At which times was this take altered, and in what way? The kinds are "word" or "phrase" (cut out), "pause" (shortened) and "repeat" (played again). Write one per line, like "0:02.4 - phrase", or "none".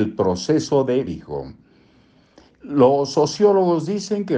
0:01.1 - phrase